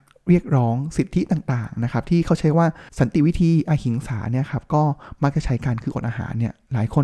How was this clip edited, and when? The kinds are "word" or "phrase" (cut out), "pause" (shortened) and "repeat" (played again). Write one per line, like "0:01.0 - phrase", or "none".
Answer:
0:02.9 - pause